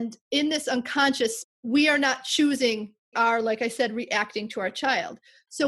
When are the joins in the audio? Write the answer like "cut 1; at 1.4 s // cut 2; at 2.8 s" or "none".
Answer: cut 1; at 1.4 s // cut 2; at 3.1 s